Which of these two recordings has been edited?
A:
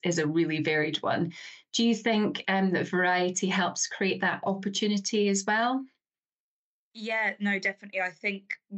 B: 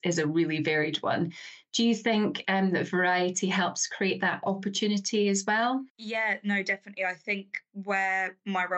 B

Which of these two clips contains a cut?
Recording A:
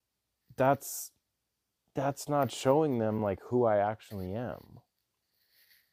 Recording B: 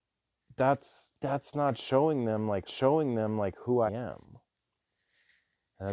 B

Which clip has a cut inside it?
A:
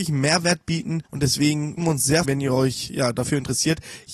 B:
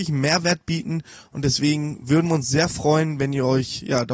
A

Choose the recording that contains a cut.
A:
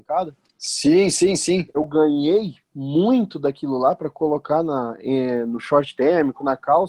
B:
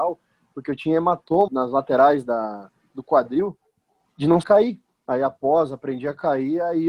B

